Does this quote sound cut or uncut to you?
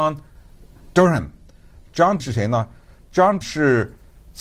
cut